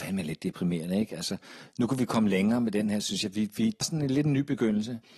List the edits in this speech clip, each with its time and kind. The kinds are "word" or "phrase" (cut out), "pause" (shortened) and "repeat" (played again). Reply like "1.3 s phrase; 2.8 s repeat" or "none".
3.8 s word